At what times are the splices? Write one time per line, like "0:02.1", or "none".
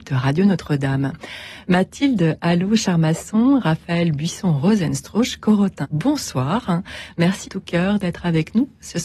0:05.8
0:07.4